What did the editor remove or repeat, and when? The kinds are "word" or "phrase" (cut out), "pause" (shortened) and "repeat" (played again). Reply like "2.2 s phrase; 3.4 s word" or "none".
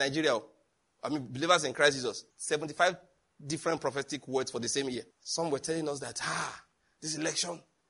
2.3 s pause; 5.1 s pause